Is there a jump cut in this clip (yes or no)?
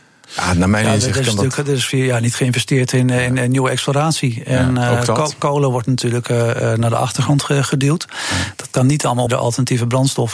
yes